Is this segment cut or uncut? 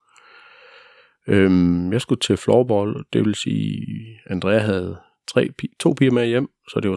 uncut